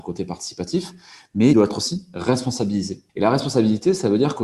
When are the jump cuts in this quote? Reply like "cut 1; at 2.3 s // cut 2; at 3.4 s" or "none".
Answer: cut 1; at 1.5 s // cut 2; at 3.1 s